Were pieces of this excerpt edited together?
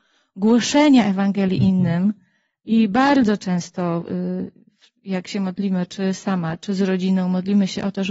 no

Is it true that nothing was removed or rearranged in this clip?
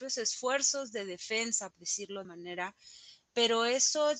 no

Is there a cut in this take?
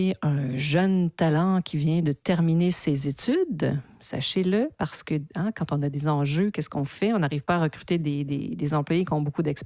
no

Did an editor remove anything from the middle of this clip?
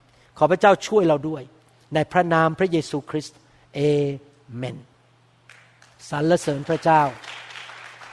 no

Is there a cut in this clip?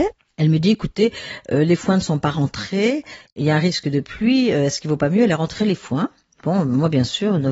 no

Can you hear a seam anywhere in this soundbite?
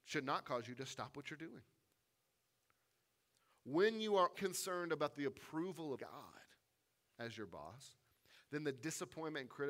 yes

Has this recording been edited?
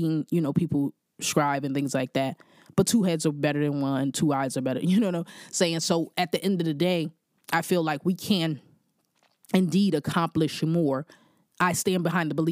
no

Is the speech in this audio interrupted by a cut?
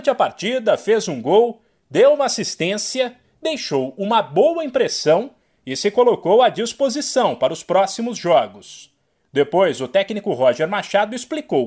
no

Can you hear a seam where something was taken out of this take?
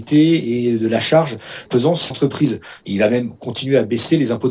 yes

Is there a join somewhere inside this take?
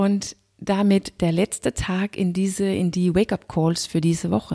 no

